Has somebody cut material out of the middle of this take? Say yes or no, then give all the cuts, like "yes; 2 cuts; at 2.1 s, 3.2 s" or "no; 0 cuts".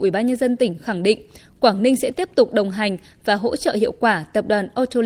no; 0 cuts